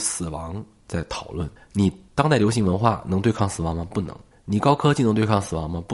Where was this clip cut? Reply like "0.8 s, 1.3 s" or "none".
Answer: 1.6 s, 4.3 s